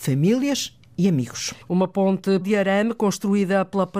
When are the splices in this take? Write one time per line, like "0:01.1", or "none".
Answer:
0:01.6
0:02.4